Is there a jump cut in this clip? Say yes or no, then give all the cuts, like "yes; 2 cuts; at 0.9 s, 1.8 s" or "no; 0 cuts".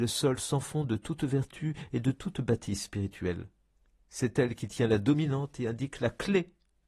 yes; 1 cut; at 3.7 s